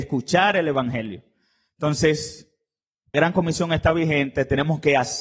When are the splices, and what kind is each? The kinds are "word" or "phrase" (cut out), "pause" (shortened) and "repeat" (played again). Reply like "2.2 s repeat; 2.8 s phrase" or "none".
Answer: 3.1 s word

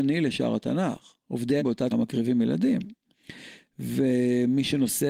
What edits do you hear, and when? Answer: 1.6 s word; 1.9 s word

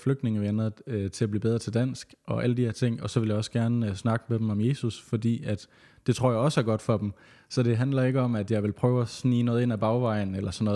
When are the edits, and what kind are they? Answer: none

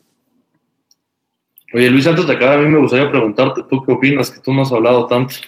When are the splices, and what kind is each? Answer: none

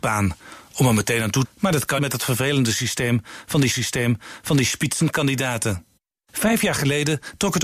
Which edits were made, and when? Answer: 1.4 s phrase; 2.0 s phrase; 3.7 s repeat

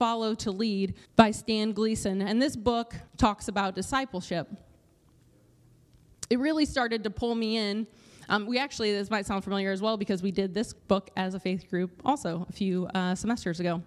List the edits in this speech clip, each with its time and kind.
1.0 s pause; 3.1 s pause; 10.8 s pause

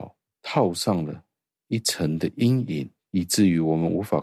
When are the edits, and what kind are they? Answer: none

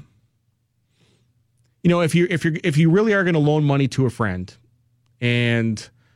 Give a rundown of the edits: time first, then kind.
none

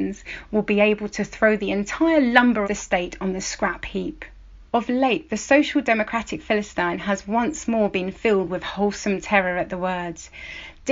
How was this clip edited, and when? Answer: 2.6 s word; 4.7 s pause

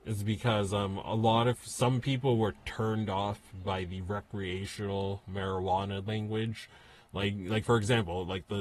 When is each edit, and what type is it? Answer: none

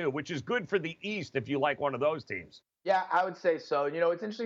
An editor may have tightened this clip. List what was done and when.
2.7 s pause

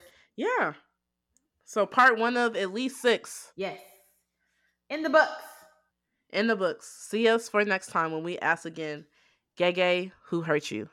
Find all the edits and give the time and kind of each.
none

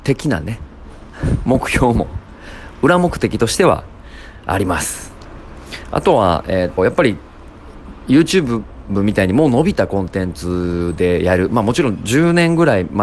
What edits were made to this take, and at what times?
6.8 s word

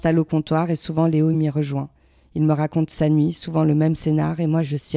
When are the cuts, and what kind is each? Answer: none

